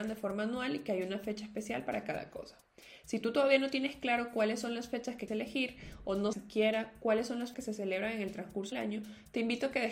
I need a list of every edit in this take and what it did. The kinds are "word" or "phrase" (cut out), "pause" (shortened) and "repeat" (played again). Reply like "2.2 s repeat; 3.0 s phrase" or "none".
5.3 s word; 6.3 s word; 7.5 s word; 8.7 s word